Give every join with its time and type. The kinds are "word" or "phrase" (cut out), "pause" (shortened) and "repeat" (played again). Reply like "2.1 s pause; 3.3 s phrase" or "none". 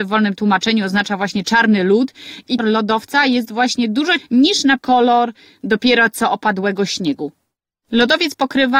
2.6 s phrase; 4.2 s word; 4.8 s word